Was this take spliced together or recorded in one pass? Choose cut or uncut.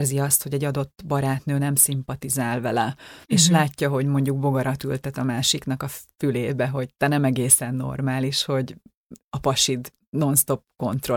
cut